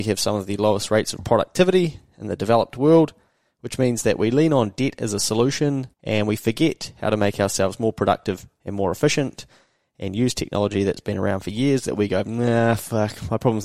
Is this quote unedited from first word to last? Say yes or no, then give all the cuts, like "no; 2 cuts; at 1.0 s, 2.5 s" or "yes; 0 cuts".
no; 1 cut; at 5.9 s